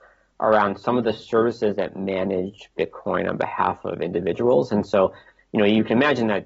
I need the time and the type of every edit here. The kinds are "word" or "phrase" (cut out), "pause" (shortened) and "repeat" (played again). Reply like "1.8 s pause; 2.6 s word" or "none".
none